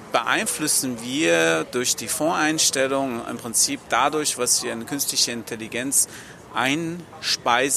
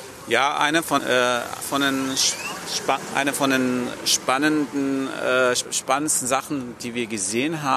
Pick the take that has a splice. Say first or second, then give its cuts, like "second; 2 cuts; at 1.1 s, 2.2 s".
second; 2 cuts; at 1.0 s, 1.6 s